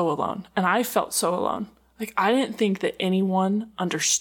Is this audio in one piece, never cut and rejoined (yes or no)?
yes